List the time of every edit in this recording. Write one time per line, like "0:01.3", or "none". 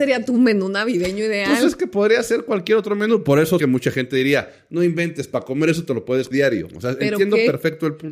0:03.6
0:06.3